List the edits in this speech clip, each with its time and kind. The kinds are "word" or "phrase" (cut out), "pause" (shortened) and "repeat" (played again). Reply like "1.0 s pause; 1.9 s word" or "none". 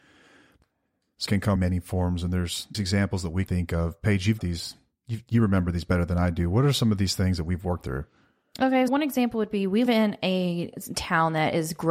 1.3 s word; 1.6 s word; 2.7 s word; 3.5 s word; 4.4 s word; 7.8 s word; 8.9 s word; 9.9 s word